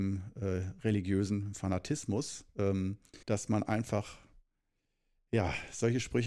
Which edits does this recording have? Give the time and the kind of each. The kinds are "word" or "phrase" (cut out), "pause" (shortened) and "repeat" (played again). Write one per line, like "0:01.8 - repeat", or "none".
0:03.2 - pause